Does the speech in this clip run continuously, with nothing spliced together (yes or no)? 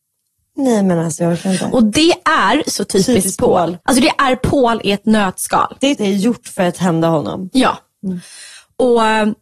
no